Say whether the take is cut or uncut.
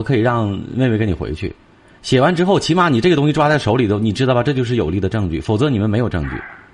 uncut